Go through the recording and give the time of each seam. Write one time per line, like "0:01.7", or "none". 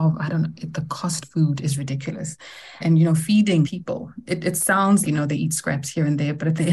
0:01.2
0:02.8
0:03.6
0:05.0